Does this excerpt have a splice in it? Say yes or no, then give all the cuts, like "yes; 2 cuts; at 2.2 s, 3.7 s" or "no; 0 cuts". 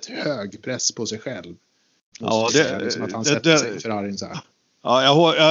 no; 0 cuts